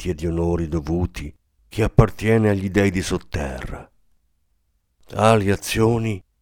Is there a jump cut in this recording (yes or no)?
no